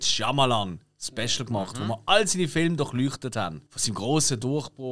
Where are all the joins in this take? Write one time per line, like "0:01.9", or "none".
0:03.7